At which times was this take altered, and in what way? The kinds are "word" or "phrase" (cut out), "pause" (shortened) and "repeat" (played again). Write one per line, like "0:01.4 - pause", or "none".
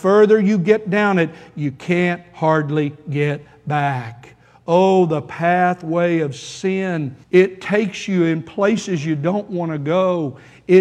0:07.2 - pause